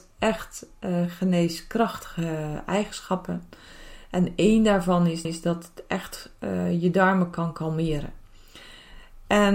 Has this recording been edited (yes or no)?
yes